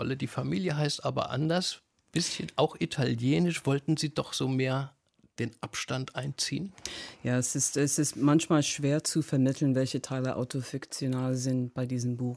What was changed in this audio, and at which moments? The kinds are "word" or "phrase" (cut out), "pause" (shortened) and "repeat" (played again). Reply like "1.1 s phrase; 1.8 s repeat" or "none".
none